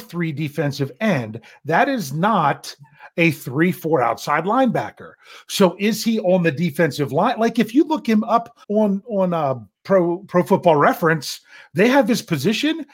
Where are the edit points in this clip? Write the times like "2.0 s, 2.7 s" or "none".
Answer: 8.6 s